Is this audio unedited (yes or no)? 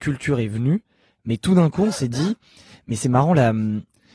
yes